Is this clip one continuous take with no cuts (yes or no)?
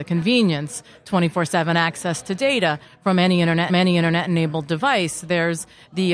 no